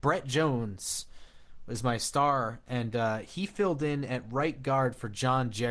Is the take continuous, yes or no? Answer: yes